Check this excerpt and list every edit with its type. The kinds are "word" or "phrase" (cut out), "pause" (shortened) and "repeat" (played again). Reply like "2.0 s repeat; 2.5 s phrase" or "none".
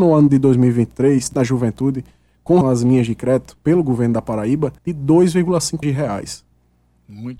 1.3 s word; 2.6 s word; 3.6 s pause; 4.8 s pause; 5.8 s word